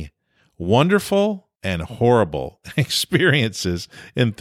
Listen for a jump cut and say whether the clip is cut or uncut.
cut